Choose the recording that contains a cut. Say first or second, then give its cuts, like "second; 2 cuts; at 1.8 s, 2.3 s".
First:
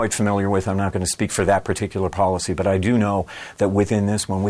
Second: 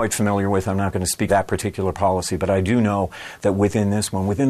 second; 1 cut; at 1.3 s